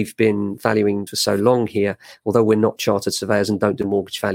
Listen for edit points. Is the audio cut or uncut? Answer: cut